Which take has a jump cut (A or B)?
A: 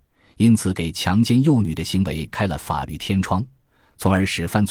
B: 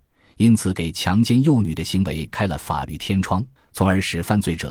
B